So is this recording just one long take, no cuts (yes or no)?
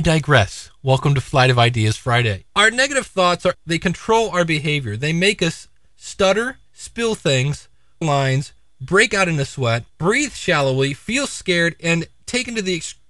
no